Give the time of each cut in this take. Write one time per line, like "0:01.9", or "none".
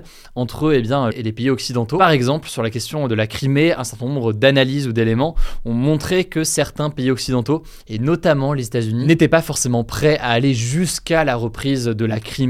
0:01.1